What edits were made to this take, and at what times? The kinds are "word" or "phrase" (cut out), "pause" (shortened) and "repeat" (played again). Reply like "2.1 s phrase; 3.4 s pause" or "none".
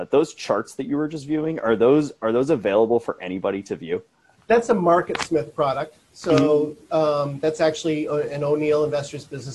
4.4 s pause